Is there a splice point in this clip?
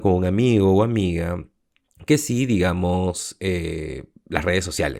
no; 0 cuts

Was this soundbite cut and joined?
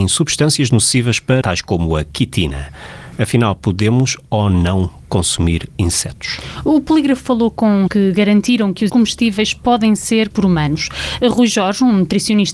yes; 4 cuts; at 1.4 s, 7.9 s, 8.9 s, 10.3 s

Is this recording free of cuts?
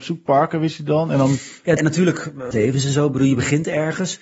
no; 2 cuts; at 1.8 s, 2.5 s

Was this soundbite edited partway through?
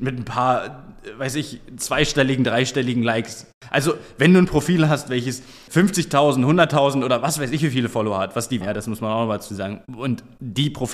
yes; 1 cut; at 8.6 s

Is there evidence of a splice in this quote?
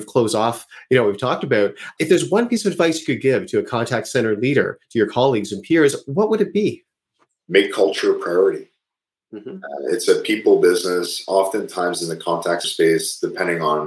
yes; 1 cut; at 12.6 s

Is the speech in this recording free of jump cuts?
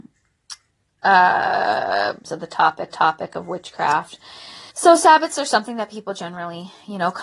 no; 3 cuts; at 2.2 s, 2.9 s, 4.7 s

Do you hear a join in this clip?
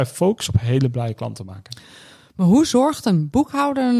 no; 0 cuts

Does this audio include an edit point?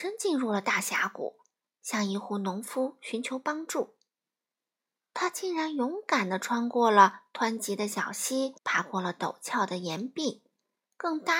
yes; 1 cut; at 8.6 s

